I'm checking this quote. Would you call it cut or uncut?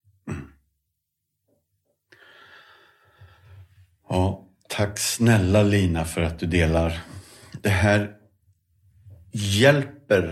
uncut